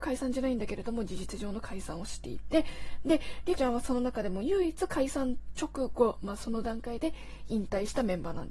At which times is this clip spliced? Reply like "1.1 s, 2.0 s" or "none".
3.6 s